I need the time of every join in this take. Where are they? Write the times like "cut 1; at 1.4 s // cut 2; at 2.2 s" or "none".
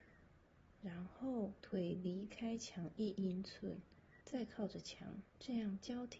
cut 1; at 1.6 s // cut 2; at 4.2 s // cut 3; at 5.3 s